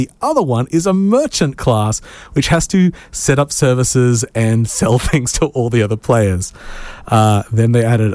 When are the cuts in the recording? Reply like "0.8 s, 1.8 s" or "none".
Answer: none